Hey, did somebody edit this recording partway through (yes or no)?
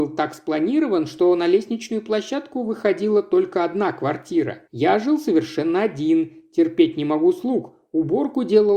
yes